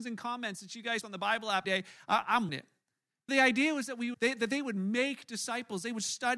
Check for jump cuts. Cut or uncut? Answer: cut